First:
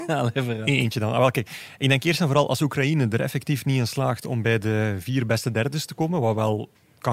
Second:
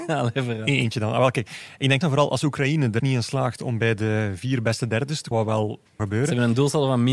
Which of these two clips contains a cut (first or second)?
second